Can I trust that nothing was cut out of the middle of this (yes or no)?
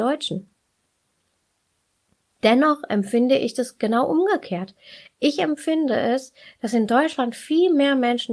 yes